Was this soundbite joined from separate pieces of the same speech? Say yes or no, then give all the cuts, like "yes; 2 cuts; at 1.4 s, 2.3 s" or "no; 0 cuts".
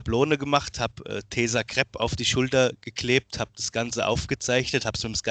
no; 0 cuts